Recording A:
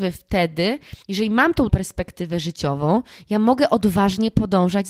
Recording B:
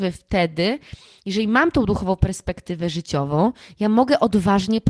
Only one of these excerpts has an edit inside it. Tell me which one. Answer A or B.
A